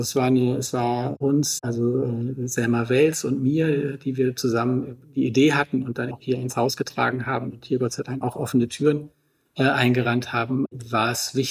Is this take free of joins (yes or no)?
no